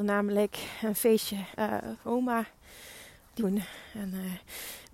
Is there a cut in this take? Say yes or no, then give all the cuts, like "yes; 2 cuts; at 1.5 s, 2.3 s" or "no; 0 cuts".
yes; 3 cuts; at 1.5 s, 2.0 s, 3.4 s